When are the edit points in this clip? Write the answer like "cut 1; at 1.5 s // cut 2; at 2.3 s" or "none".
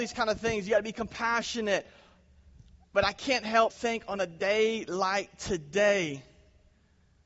cut 1; at 3.7 s